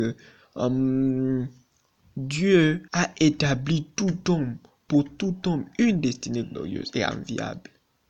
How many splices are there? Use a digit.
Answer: 1